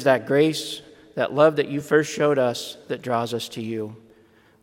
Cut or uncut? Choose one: uncut